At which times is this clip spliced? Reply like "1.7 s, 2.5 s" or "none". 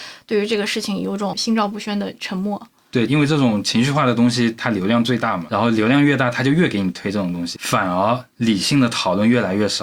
5.5 s, 7.6 s